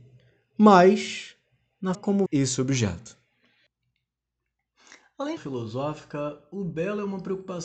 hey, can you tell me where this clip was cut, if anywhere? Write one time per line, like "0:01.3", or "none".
0:01.9
0:02.3
0:05.4